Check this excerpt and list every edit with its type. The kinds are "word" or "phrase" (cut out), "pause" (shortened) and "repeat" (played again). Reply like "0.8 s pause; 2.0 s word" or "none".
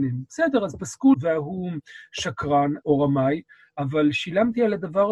1.1 s phrase; 2.8 s word